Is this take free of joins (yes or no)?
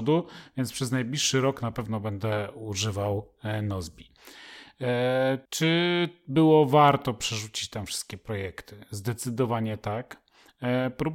no